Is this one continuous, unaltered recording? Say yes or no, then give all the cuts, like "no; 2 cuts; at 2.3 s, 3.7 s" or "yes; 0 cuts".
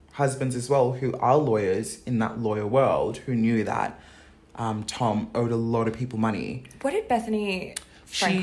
yes; 0 cuts